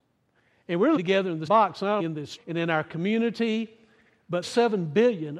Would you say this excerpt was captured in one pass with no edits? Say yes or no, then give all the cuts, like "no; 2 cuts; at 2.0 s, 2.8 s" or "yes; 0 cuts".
no; 5 cuts; at 1.0 s, 1.5 s, 2.0 s, 2.4 s, 4.4 s